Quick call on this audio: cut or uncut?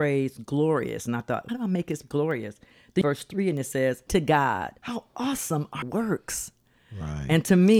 cut